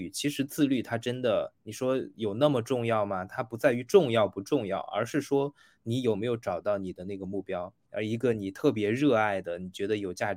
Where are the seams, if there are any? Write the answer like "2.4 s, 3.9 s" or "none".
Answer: 7.8 s

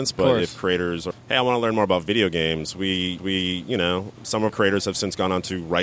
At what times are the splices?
1.1 s, 3.2 s, 4.5 s

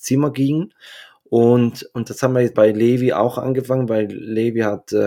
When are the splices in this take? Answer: 2.5 s

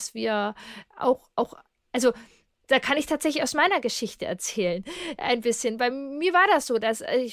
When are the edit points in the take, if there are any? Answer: none

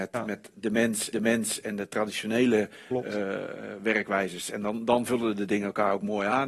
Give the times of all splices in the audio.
1.1 s

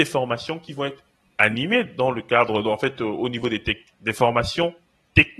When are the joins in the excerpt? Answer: none

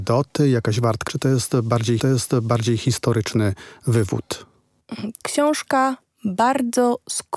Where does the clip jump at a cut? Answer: 1.1 s, 2.0 s, 5.2 s

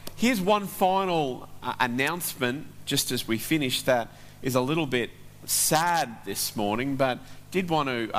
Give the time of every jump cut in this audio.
none

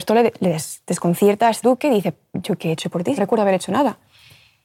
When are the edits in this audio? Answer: 1.6 s, 3.2 s

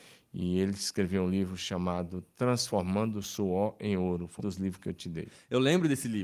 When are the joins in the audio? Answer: 4.4 s

